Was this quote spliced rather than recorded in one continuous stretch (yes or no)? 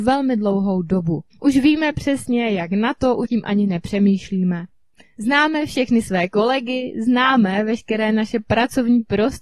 yes